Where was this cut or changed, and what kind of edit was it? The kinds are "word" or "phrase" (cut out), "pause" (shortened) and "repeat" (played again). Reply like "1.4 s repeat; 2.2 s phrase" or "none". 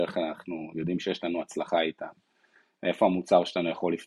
none